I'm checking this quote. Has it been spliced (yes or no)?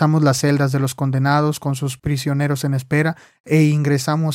no